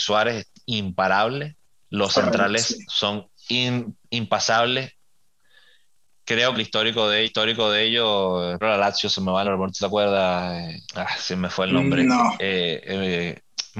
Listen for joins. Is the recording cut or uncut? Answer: cut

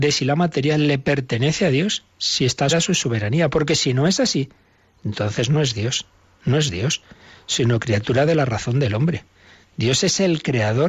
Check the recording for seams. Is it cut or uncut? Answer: cut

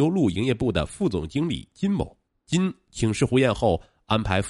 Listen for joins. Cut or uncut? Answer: cut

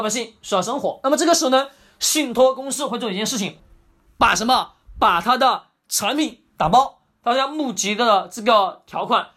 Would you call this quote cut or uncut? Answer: uncut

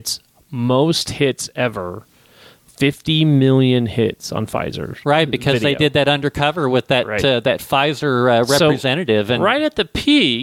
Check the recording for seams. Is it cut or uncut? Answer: uncut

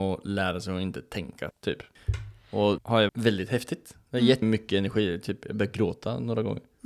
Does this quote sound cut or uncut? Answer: cut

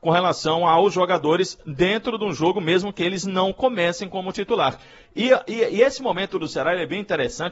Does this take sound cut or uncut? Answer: uncut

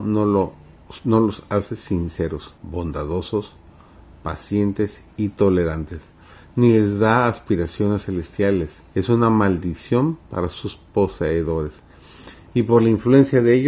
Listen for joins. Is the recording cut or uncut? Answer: cut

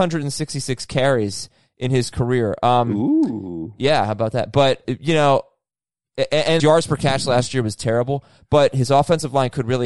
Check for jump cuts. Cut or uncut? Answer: cut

